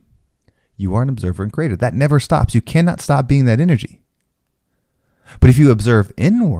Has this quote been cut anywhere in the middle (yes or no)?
no